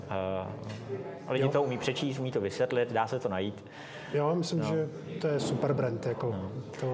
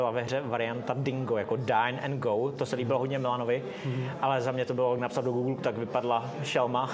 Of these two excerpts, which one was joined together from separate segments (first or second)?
second